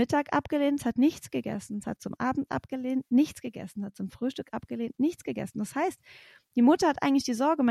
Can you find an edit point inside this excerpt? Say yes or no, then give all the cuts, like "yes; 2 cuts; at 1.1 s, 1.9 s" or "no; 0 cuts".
no; 0 cuts